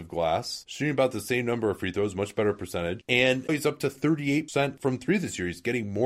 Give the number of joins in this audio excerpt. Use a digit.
1